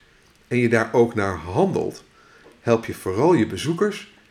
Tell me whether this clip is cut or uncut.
uncut